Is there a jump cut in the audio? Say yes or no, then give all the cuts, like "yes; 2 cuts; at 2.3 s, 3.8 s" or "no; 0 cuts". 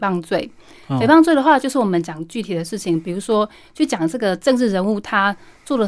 no; 0 cuts